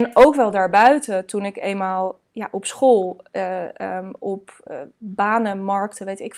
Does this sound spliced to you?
no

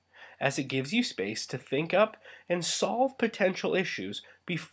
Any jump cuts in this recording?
no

